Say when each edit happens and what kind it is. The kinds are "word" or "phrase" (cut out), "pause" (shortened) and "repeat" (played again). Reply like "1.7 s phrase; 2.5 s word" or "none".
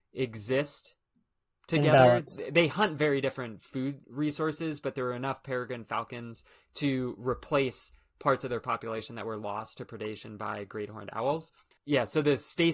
none